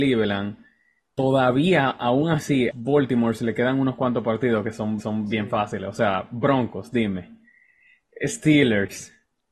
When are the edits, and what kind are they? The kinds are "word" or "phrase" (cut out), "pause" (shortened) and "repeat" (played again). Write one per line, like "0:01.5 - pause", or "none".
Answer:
0:02.7 - phrase
0:05.0 - repeat